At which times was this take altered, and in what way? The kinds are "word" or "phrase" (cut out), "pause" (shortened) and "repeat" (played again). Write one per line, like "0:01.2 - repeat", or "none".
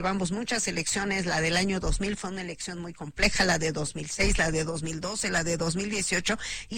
none